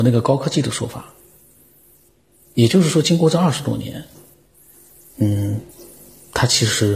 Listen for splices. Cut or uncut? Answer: uncut